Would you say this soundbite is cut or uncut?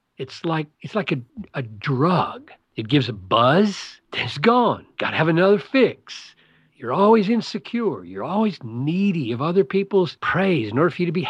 uncut